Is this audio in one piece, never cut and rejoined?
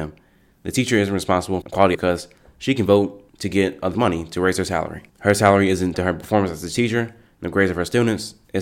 no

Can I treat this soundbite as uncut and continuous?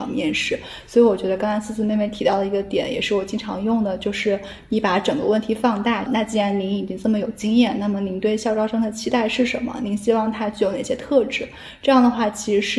no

